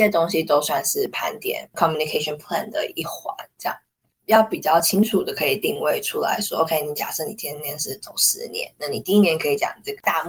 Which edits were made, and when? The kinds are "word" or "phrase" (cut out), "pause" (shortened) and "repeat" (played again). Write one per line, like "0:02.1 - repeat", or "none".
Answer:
none